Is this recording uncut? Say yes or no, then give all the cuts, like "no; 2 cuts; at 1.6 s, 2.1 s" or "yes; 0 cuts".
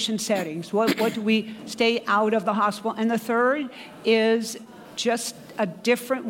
yes; 0 cuts